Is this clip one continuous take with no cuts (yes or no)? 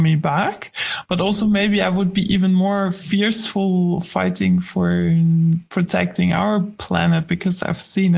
yes